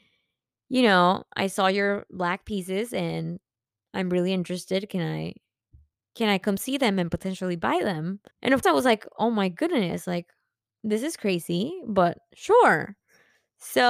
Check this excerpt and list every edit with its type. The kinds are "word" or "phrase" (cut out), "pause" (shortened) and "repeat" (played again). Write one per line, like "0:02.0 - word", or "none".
0:08.3 - pause
0:08.6 - word